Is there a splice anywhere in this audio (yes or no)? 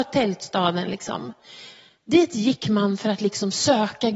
no